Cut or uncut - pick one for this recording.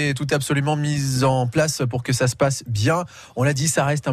uncut